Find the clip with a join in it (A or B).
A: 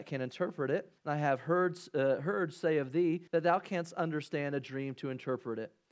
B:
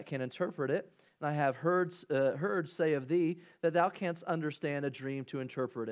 A